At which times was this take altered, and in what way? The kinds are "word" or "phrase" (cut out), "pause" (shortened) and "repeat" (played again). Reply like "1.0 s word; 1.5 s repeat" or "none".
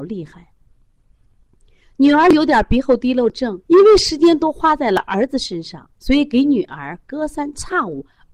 3.6 s pause; 5.9 s pause